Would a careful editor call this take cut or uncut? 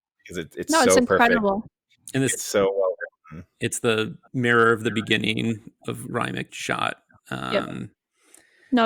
cut